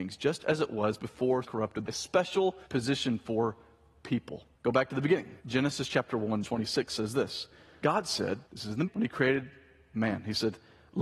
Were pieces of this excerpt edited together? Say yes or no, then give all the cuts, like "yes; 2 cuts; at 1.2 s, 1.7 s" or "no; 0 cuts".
yes; 9 cuts; at 1.4 s, 1.8 s, 2.6 s, 4.5 s, 5.4 s, 6.4 s, 7.8 s, 8.5 s, 8.9 s